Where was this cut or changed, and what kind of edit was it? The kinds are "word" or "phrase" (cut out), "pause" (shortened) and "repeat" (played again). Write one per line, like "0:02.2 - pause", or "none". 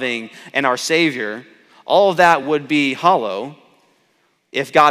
none